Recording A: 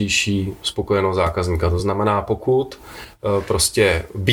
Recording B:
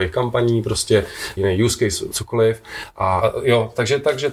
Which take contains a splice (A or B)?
B